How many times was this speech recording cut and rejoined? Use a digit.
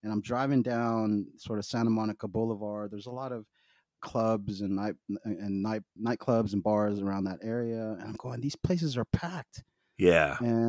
1